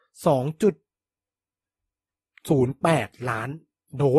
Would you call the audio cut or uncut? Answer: uncut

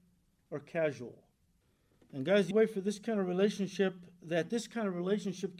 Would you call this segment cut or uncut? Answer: cut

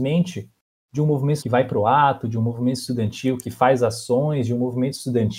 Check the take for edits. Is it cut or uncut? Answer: cut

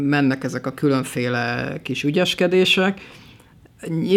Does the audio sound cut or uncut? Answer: uncut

